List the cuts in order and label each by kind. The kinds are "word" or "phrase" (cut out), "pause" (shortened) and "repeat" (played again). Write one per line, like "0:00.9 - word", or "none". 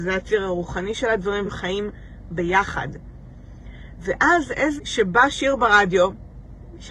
0:01.4 - word
0:04.8 - word